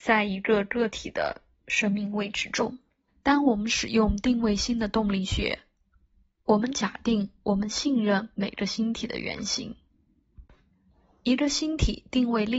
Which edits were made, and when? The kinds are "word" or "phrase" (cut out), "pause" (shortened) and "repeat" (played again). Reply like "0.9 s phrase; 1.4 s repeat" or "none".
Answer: 3.1 s pause